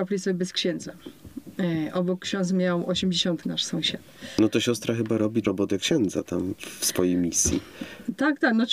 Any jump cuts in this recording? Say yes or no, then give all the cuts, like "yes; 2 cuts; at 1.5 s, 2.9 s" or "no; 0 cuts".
yes; 2 cuts; at 3.4 s, 5.4 s